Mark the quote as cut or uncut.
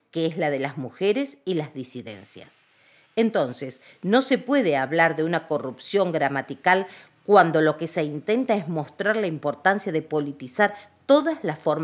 uncut